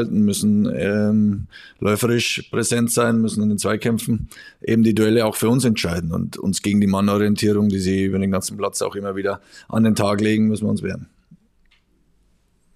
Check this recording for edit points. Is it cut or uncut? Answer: uncut